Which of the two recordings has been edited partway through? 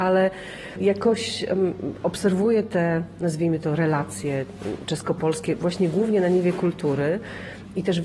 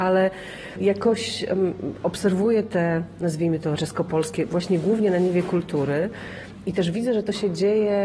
second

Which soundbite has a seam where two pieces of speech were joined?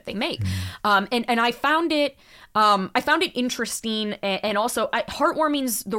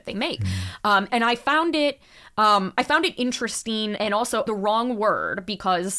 second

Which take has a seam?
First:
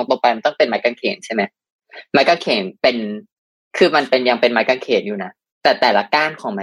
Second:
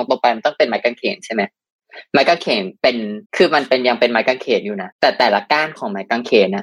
second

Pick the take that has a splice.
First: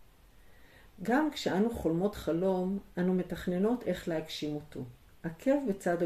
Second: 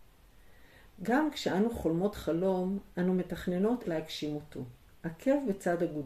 second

